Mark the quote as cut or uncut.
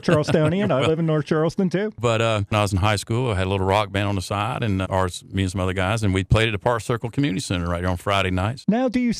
cut